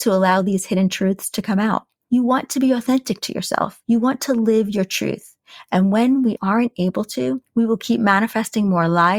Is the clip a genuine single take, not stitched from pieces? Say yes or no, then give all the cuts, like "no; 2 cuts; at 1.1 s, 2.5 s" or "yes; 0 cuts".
yes; 0 cuts